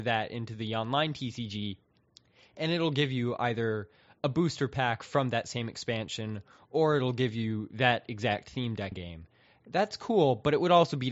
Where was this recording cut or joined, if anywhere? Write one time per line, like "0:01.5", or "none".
0:08.9